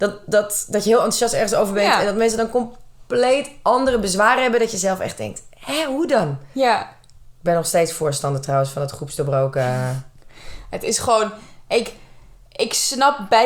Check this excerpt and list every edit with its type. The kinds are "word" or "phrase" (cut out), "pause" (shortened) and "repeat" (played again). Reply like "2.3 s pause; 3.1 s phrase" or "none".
none